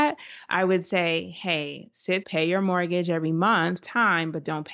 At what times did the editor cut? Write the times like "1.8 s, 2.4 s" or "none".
2.2 s, 3.8 s